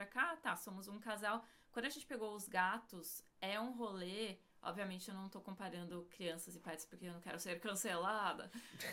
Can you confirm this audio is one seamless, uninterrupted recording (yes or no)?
yes